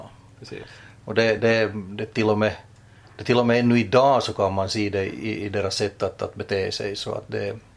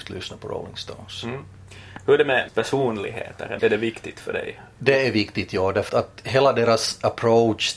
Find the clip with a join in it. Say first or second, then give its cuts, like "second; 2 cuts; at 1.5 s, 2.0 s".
second; 3 cuts; at 2.5 s, 3.6 s, 5.9 s